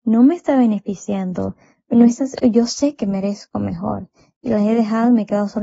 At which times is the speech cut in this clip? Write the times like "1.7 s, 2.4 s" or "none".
none